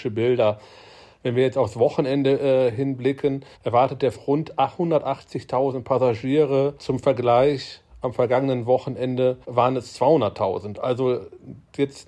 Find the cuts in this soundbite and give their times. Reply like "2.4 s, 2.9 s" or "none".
3.5 s, 4.1 s, 6.8 s, 9.4 s